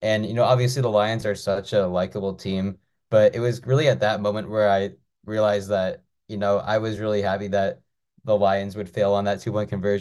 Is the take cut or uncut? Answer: uncut